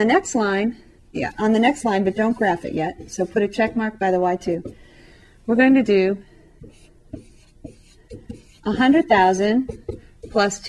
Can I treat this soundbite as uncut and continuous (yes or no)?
no